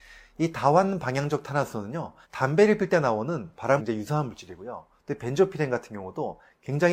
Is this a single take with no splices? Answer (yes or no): no